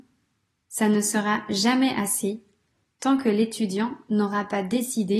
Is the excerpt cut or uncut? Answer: uncut